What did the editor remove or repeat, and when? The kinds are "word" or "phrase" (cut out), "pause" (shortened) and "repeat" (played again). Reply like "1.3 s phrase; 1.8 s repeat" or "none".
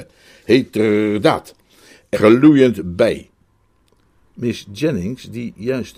2.1 s word